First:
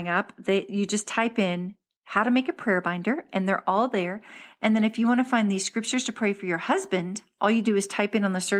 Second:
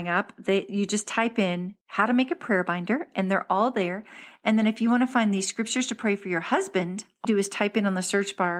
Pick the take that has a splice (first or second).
second